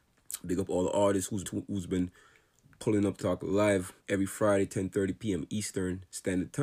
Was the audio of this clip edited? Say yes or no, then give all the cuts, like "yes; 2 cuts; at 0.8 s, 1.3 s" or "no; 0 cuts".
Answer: yes; 3 cuts; at 1.4 s, 3.2 s, 4.0 s